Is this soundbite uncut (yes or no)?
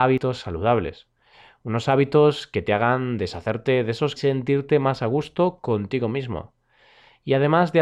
no